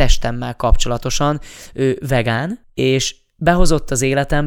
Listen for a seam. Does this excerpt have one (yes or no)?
no